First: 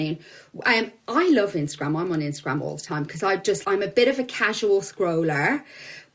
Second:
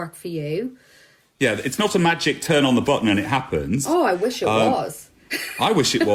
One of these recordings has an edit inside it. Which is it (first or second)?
first